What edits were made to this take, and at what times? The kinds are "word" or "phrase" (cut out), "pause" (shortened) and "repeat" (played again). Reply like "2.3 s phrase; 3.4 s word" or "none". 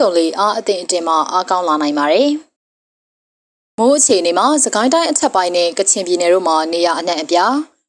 2.6 s pause